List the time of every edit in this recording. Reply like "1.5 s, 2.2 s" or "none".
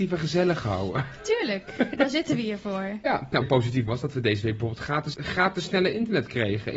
3.4 s, 3.9 s, 5.1 s